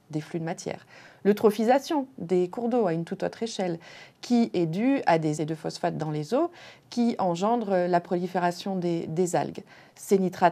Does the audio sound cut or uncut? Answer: cut